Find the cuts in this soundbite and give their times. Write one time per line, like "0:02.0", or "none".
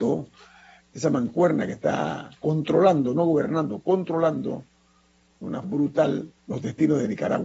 0:02.4
0:05.6
0:06.4

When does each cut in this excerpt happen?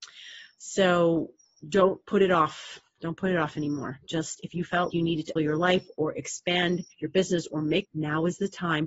0:01.5
0:04.9
0:05.4
0:06.9
0:07.8

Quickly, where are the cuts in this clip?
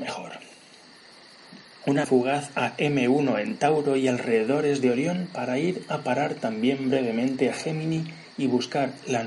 0:02.0

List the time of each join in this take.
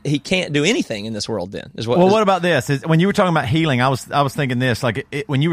none

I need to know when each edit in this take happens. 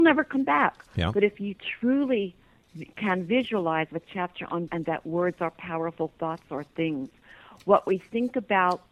0:03.9
0:04.7

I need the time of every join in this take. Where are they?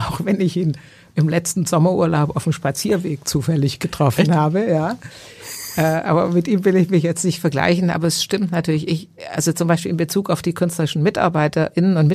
none

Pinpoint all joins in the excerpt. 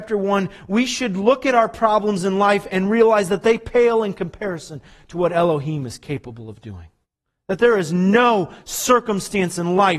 0:07.0

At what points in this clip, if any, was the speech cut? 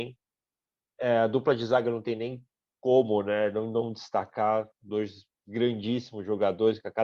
none

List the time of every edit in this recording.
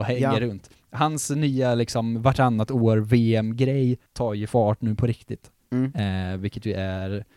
0:04.1

